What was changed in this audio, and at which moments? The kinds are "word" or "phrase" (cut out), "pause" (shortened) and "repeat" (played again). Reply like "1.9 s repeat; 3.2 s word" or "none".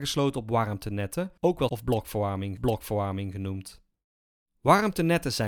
1.4 s pause; 1.7 s word; 2.6 s repeat